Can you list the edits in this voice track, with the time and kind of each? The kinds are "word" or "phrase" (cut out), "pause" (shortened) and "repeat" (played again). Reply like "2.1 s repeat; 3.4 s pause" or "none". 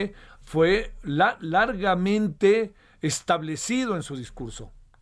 none